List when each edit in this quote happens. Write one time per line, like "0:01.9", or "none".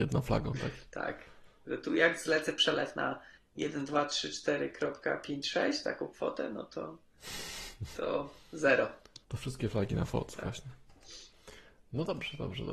0:09.2